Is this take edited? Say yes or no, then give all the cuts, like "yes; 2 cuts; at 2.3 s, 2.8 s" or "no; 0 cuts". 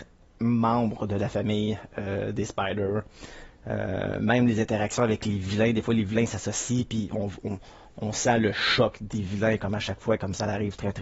no; 0 cuts